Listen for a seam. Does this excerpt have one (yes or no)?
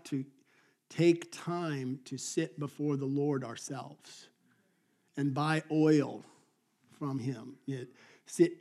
no